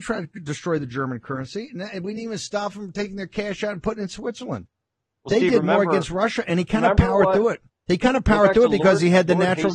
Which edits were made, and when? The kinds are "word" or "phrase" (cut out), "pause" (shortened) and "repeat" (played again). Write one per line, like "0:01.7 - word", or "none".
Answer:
none